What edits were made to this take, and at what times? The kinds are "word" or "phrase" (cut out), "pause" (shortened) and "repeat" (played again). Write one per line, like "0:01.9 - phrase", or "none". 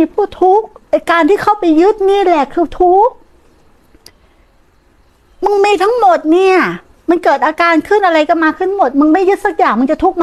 none